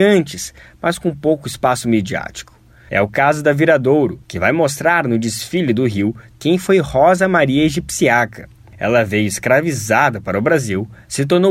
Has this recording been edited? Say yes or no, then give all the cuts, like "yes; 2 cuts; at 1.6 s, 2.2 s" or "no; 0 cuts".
yes; 1 cut; at 4.2 s